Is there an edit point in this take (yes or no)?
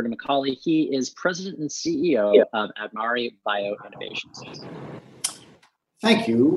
no